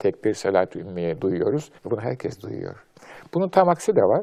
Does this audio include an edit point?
yes; 1 cut; at 1.8 s

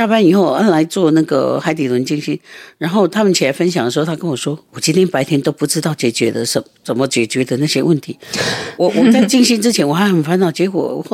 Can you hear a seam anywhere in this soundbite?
yes; 1 cut; at 4.7 s

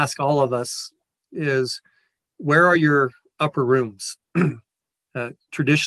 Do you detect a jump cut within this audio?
no; 0 cuts

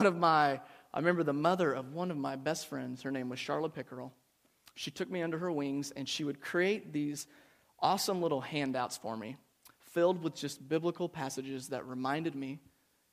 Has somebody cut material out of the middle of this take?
no; 0 cuts

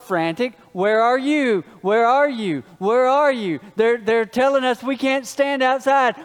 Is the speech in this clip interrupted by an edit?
no; 0 cuts

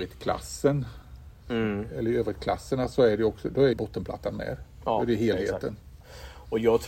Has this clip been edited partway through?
yes; 1 cut; at 3.7 s

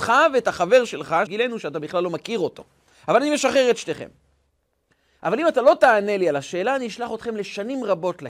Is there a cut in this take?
yes; 1 cut; at 1.3 s

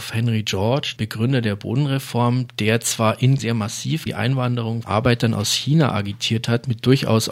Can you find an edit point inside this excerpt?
yes; 4 cuts; at 1.0 s, 3.4 s, 4.1 s, 4.8 s

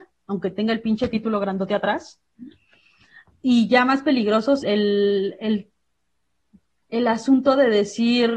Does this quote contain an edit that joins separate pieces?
yes; 1 cut; at 4.6 s

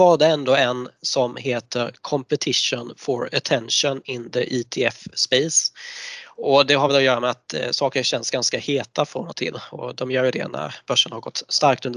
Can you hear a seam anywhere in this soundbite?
no; 0 cuts

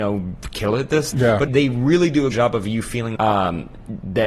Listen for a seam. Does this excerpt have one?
yes; 4 cuts; at 1.1 s, 1.5 s, 2.3 s, 3.2 s

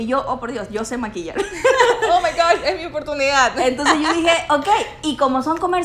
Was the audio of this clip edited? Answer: no; 0 cuts

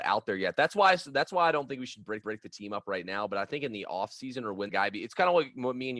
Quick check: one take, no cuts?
no; 2 cuts; at 2.2 s, 4.7 s

